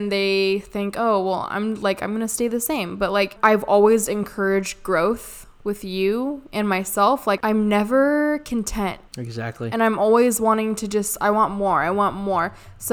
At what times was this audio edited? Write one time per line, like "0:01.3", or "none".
none